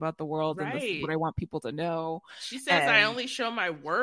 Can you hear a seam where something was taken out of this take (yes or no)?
no